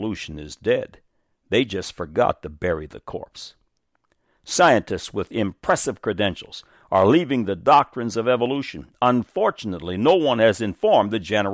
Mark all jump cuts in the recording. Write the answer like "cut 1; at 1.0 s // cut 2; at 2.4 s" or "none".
none